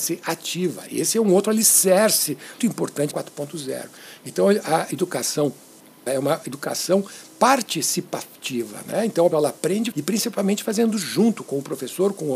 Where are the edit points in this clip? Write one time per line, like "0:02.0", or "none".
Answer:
0:02.6
0:03.1
0:06.1
0:09.3
0:09.9